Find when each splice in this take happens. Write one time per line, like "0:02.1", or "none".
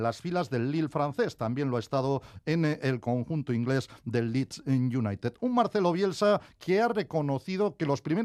none